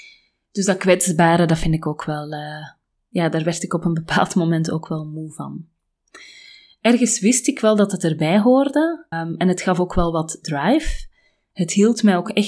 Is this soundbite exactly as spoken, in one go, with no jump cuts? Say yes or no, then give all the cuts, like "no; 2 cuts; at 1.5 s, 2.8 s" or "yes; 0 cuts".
no; 1 cut; at 9.1 s